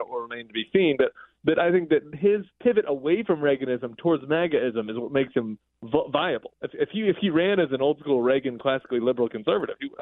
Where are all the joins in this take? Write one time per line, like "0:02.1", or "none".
0:02.5